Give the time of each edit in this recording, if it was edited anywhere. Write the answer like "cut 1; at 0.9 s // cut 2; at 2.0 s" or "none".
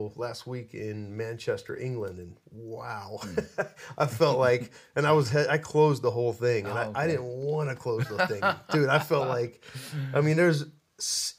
none